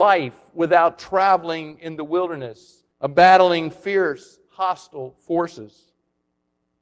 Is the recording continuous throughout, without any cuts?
no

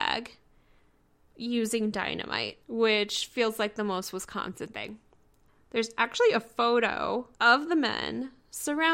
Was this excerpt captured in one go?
no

